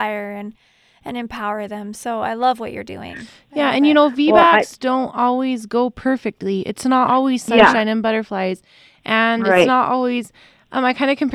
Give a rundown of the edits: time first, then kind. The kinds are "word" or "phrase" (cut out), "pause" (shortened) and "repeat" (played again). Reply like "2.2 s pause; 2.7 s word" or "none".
none